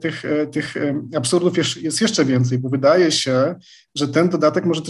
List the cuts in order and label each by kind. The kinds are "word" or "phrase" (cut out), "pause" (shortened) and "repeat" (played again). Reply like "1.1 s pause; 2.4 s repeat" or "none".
none